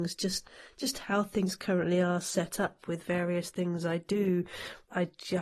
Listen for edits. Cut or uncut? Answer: uncut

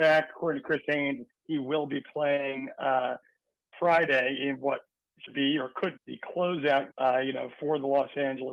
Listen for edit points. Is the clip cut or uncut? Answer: cut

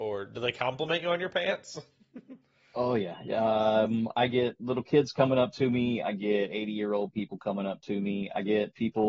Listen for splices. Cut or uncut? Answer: uncut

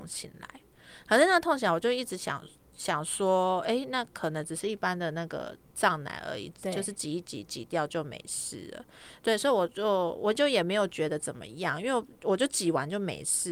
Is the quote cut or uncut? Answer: uncut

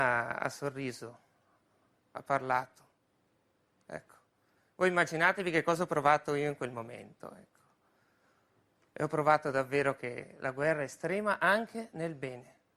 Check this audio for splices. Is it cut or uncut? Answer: uncut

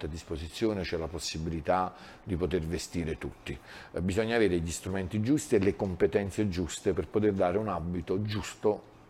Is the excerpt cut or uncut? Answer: uncut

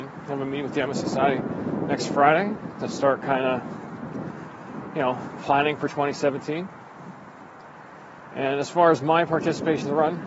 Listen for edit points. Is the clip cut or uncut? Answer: uncut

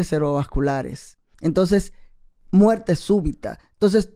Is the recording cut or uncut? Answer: cut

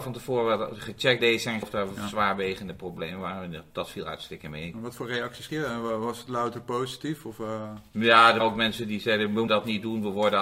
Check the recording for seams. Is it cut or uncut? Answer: cut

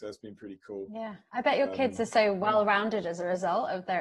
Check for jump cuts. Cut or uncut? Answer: uncut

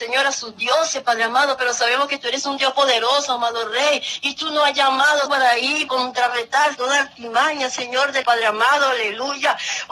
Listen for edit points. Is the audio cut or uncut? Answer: cut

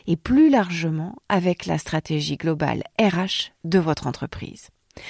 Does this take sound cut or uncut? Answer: uncut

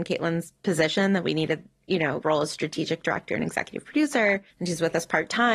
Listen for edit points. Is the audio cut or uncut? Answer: cut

